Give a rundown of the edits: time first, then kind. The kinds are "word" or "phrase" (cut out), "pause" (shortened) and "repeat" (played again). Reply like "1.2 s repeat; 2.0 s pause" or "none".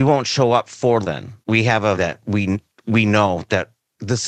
1.0 s word; 1.4 s pause; 2.0 s word